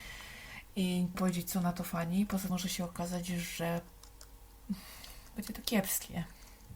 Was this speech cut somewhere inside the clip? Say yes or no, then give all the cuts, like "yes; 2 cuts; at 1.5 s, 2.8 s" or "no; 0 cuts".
yes; 2 cuts; at 1.1 s, 2.5 s